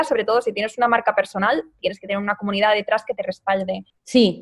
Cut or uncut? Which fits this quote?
uncut